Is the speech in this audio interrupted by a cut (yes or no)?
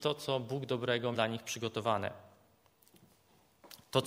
yes